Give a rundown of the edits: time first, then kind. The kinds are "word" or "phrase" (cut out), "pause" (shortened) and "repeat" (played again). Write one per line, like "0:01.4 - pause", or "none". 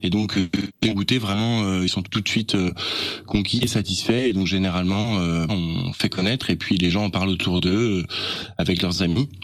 0:02.0 - word
0:05.5 - phrase